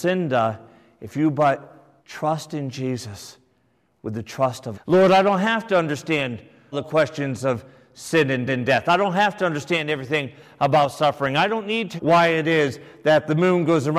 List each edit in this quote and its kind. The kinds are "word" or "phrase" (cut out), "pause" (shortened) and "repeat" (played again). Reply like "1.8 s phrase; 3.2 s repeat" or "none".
2.0 s pause; 4.7 s phrase; 6.7 s word; 8.5 s repeat; 12.0 s word